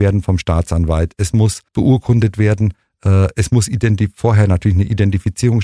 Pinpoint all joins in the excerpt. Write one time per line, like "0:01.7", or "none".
0:01.7